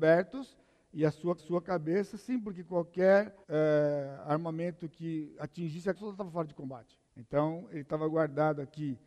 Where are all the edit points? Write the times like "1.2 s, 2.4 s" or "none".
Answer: 1.4 s, 3.4 s, 5.9 s, 7.1 s